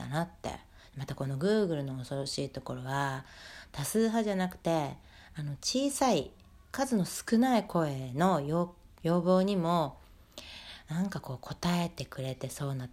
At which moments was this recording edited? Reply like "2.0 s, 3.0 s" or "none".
6.6 s, 8.9 s